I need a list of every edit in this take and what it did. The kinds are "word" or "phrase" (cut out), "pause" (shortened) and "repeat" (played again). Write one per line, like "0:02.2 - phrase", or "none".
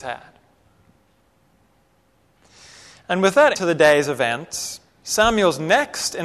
0:03.5 - word